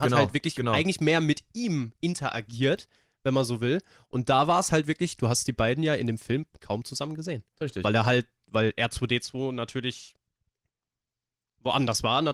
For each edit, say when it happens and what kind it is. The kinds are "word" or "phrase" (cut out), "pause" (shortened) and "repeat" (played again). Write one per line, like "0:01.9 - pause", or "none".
none